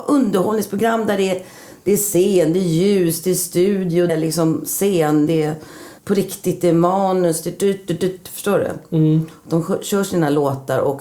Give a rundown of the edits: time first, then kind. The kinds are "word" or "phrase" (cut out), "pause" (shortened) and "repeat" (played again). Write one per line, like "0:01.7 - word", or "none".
0:04.1 - word
0:06.0 - pause